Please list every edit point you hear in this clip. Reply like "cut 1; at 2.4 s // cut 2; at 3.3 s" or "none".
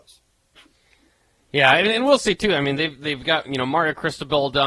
none